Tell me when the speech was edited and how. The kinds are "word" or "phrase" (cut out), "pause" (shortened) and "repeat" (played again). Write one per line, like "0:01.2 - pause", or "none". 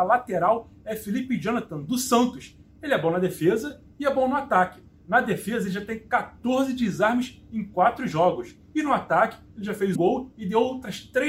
0:10.0 - word